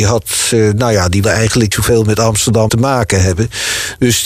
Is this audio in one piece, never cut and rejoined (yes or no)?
no